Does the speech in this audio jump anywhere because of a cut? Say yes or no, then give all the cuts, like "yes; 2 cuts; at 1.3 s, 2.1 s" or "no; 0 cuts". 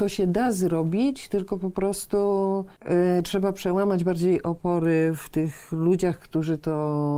no; 0 cuts